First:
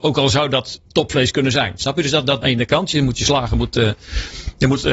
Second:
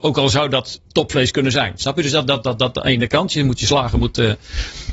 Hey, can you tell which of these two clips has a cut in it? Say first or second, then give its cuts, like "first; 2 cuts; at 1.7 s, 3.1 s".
first; 1 cut; at 2.4 s